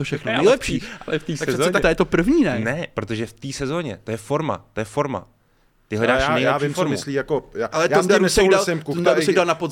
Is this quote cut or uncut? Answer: cut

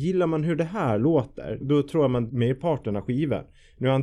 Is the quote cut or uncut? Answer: cut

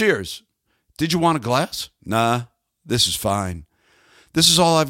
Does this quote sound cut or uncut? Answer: uncut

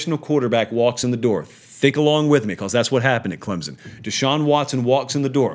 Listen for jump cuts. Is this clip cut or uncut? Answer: uncut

